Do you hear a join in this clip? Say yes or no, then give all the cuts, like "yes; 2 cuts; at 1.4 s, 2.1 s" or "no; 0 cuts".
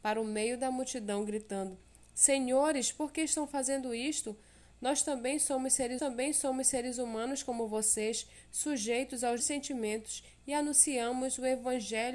yes; 2 cuts; at 6.0 s, 9.4 s